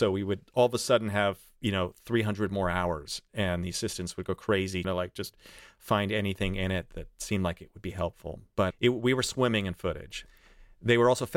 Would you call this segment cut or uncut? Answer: cut